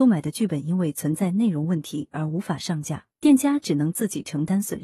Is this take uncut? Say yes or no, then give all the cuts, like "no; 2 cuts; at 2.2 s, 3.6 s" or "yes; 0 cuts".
no; 1 cut; at 3.1 s